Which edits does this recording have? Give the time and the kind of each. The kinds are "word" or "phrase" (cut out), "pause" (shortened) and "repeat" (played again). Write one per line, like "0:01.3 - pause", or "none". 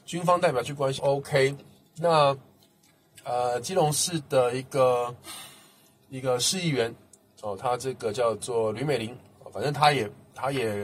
0:01.0 - phrase